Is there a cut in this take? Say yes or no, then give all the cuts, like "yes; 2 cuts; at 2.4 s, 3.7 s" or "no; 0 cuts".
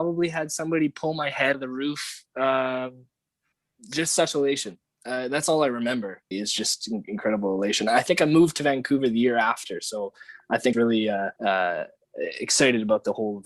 yes; 5 cuts; at 1.5 s, 3.5 s, 6.3 s, 10.7 s, 11.4 s